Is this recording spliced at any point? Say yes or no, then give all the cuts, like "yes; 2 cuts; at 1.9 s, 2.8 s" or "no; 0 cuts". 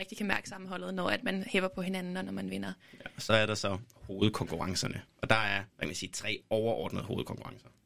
yes; 2 cuts; at 5.1 s, 5.7 s